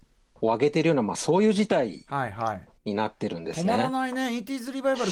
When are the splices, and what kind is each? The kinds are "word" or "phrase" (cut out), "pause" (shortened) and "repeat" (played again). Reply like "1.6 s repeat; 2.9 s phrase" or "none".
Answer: 2.8 s pause